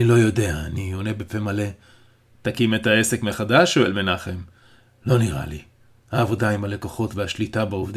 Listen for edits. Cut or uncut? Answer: uncut